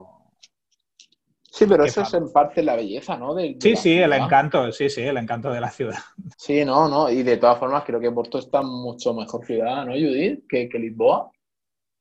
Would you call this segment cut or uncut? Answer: cut